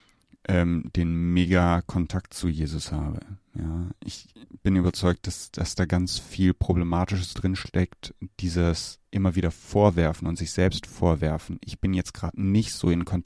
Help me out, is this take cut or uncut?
uncut